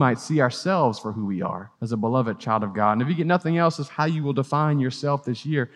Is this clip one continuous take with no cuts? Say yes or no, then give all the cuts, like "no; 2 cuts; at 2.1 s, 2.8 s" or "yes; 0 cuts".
no; 1 cut; at 1.8 s